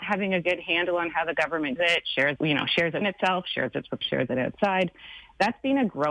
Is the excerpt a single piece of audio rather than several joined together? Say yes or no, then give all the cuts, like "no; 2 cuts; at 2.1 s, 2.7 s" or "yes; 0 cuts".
no; 4 cuts; at 1.8 s, 2.4 s, 3.0 s, 4.0 s